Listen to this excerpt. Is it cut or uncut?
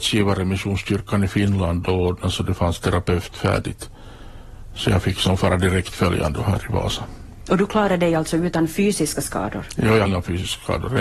cut